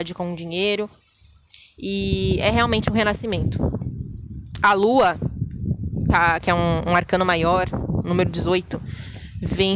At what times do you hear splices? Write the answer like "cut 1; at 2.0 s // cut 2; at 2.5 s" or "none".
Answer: none